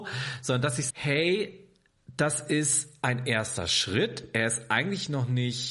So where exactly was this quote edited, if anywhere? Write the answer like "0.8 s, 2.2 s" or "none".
0.9 s